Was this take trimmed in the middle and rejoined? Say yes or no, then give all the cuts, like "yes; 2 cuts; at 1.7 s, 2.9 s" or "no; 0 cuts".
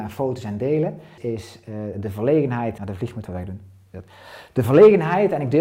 yes; 3 cuts; at 1.2 s, 2.8 s, 3.3 s